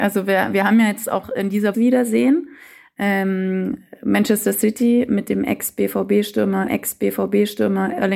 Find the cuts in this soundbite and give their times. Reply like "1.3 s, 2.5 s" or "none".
1.2 s, 1.7 s, 6.7 s

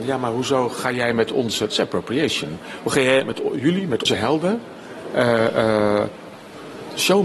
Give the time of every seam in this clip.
4.1 s

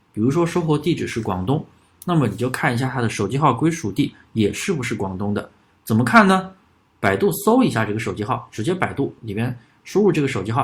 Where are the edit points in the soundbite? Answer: 9.2 s

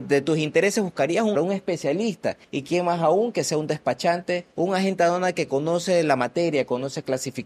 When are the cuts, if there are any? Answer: 1.3 s, 2.4 s, 4.5 s

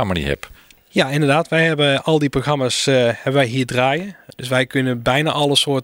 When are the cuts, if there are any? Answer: none

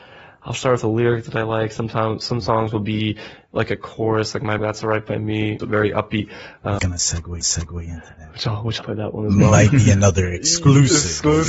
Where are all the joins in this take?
4.6 s, 5.6 s, 6.8 s, 7.4 s, 8.8 s

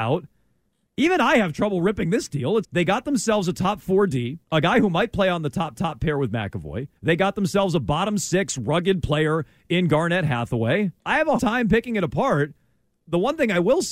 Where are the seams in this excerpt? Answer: 2.6 s, 4.4 s, 5.7 s, 7.0 s, 11.0 s, 11.4 s

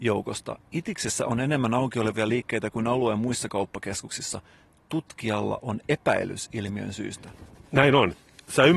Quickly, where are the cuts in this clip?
none

